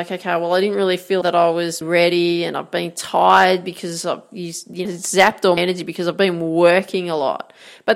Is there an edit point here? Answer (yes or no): yes